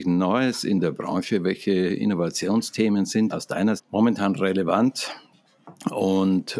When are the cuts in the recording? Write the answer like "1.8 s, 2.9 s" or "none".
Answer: 3.3 s, 3.8 s